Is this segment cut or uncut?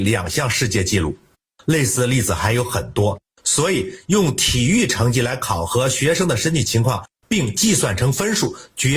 uncut